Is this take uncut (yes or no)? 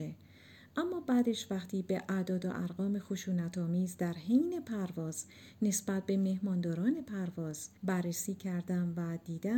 no